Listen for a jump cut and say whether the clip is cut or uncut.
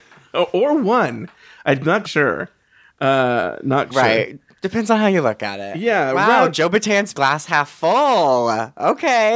cut